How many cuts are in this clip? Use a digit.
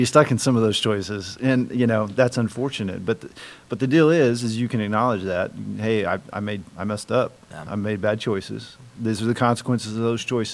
1